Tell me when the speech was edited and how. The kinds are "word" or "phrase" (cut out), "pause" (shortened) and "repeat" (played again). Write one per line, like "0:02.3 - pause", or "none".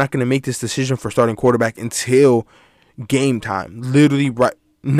none